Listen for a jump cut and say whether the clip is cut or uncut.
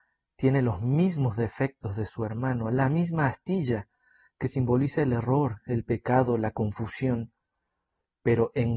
uncut